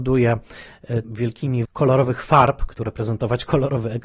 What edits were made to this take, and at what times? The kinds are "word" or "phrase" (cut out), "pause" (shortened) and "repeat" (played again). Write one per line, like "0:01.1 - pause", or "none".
0:01.0 - word
0:01.6 - word
0:02.8 - word